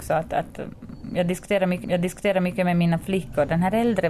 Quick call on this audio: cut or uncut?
cut